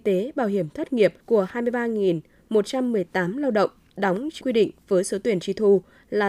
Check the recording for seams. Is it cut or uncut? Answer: cut